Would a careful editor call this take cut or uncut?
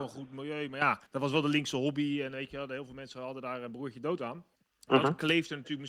cut